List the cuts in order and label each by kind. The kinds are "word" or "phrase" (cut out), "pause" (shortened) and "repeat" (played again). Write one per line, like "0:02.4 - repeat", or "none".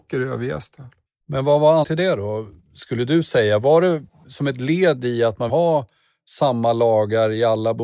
0:01.1 - pause
0:01.8 - word
0:05.5 - phrase